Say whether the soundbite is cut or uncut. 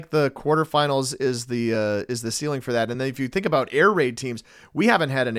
uncut